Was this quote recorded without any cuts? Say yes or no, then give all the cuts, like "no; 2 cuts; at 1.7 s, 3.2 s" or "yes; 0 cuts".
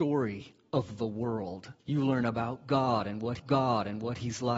no; 2 cuts; at 1.8 s, 3.4 s